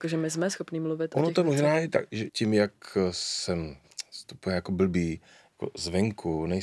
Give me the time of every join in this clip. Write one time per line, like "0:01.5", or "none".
0:02.3